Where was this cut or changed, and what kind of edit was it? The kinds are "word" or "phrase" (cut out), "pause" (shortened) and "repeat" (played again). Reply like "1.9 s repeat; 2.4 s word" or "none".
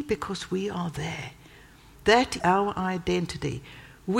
2.4 s word